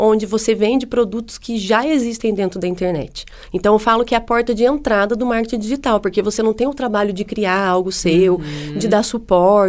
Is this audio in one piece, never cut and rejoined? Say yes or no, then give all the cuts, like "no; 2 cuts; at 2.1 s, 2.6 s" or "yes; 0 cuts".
yes; 0 cuts